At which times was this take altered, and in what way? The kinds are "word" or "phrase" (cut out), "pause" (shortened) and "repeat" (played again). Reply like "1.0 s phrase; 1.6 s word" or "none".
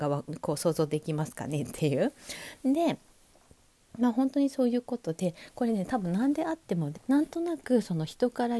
6.9 s word